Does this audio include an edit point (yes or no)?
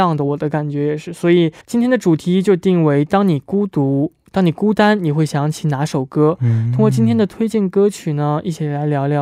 yes